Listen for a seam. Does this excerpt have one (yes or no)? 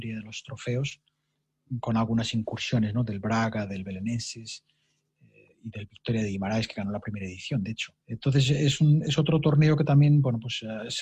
yes